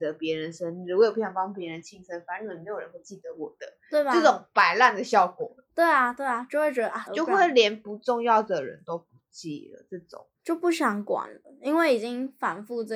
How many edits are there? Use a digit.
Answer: 2